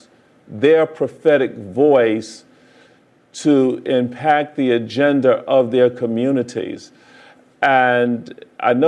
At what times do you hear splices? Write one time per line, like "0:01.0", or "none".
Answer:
none